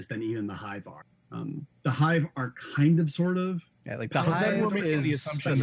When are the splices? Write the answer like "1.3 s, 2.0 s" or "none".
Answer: 1.1 s, 3.7 s